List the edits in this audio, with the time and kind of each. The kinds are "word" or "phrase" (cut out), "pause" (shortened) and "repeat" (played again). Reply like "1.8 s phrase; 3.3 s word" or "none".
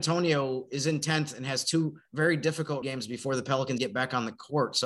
2.1 s pause; 2.8 s word; 3.8 s word